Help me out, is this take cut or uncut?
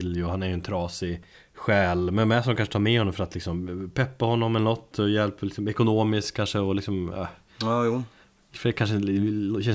cut